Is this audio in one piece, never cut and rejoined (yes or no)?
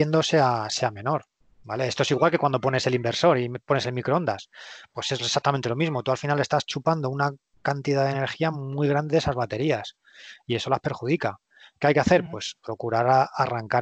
yes